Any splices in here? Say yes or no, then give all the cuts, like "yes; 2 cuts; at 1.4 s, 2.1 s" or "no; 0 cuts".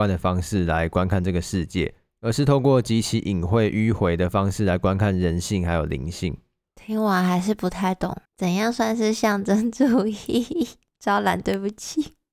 yes; 1 cut; at 8.3 s